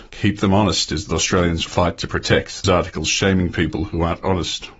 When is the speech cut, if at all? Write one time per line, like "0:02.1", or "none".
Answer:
0:01.1
0:01.7
0:02.6